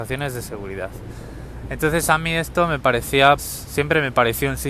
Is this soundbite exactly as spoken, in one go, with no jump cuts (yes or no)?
no